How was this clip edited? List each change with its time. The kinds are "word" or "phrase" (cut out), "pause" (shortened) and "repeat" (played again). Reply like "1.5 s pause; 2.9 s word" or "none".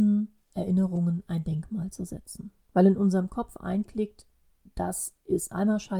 2.6 s pause